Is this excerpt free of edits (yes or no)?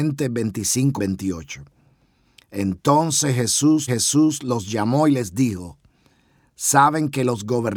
no